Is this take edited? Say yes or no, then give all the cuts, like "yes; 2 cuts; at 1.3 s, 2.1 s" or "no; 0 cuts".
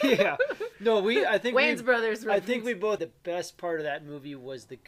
yes; 1 cut; at 3.0 s